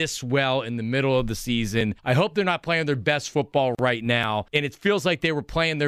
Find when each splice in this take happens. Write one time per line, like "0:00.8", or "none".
0:02.0
0:04.5